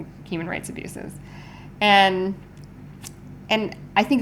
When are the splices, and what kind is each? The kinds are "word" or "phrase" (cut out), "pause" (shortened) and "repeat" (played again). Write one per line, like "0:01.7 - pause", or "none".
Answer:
none

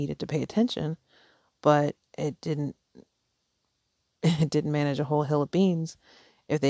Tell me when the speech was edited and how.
none

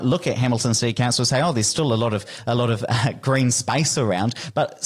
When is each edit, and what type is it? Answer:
none

